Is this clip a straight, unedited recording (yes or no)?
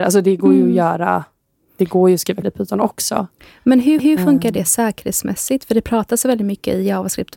no